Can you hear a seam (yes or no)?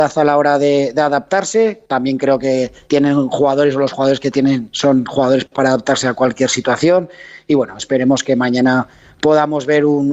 no